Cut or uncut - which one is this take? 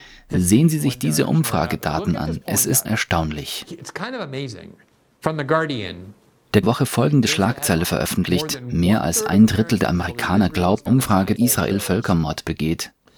cut